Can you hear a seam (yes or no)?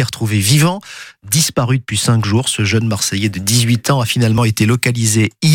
no